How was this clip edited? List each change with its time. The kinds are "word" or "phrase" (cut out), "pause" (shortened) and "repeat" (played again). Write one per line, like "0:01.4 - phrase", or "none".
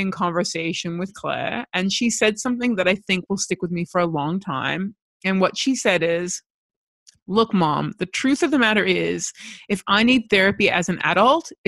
none